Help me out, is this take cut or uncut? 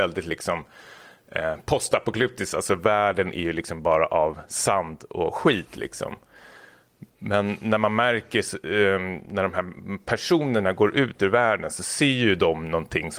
uncut